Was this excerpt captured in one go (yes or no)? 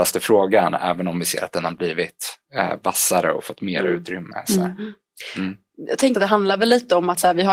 no